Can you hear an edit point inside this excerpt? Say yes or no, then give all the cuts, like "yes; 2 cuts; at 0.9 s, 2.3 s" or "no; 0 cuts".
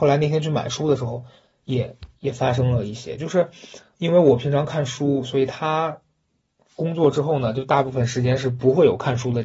yes; 1 cut; at 3.9 s